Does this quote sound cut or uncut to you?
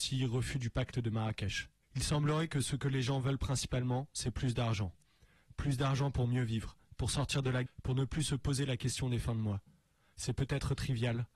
cut